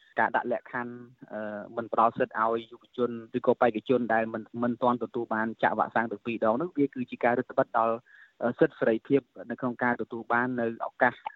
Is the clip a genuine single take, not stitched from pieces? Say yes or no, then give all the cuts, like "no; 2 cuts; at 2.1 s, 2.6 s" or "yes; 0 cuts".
no; 1 cut; at 3.3 s